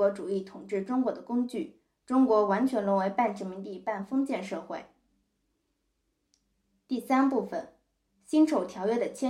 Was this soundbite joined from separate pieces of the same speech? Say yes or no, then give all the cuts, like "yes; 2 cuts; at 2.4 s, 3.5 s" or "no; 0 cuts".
no; 0 cuts